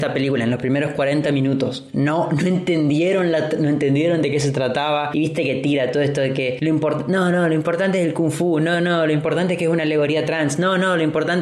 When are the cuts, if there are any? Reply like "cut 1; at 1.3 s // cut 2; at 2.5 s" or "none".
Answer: none